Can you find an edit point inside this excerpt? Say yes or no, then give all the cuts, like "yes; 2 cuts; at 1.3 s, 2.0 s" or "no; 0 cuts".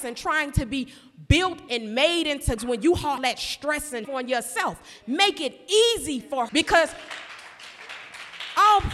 yes; 5 cuts; at 1.7 s, 2.6 s, 3.2 s, 4.0 s, 6.5 s